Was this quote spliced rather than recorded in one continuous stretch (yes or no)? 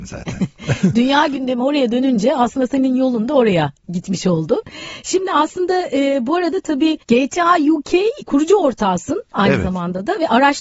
yes